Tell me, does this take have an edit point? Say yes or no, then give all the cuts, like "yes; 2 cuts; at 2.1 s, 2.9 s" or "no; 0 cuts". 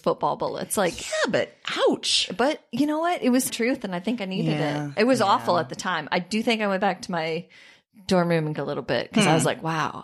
yes; 2 cuts; at 3.5 s, 8.6 s